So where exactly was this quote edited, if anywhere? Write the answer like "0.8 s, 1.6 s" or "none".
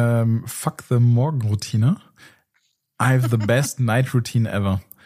none